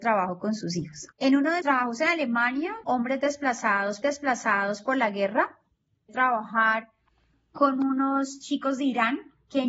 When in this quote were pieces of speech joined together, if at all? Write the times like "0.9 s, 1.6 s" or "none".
1.1 s, 1.6 s, 2.8 s, 4.0 s, 6.1 s